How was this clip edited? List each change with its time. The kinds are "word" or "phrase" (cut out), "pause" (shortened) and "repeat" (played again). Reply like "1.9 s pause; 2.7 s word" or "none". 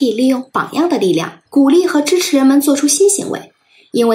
1.5 s pause